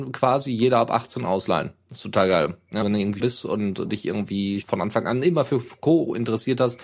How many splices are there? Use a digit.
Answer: 3